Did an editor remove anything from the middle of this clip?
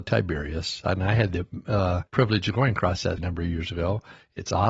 yes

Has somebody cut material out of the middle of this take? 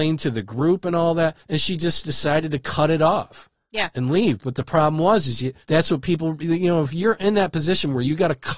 yes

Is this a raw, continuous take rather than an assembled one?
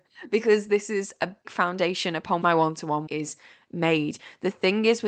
no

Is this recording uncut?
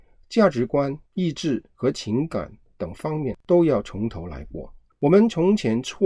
no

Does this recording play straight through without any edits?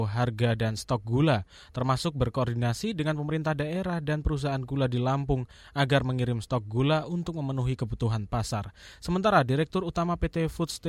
yes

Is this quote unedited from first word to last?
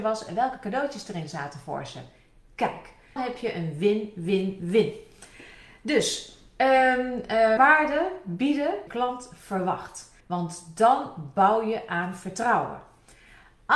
no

